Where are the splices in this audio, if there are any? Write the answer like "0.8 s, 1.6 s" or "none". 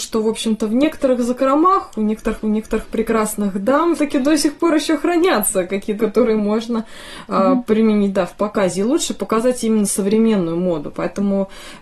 2.4 s, 4.0 s, 6.0 s